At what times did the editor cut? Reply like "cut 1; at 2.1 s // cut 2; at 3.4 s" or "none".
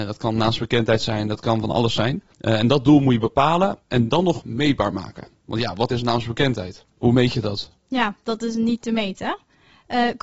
cut 1; at 2.3 s // cut 2; at 3.8 s // cut 3; at 6.9 s